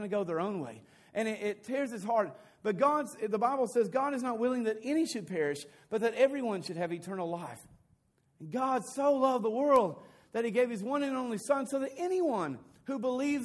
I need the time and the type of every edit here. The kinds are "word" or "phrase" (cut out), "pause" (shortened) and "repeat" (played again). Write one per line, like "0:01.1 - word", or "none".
none